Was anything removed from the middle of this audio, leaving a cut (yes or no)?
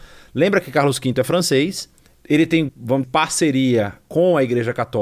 yes